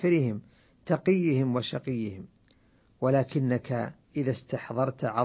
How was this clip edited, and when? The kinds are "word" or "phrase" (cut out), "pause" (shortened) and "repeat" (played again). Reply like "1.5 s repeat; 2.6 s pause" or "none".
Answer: 4.0 s pause